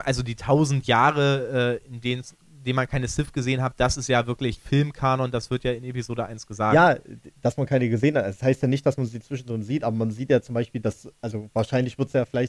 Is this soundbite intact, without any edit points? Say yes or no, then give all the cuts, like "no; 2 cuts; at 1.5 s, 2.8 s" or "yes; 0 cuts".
yes; 0 cuts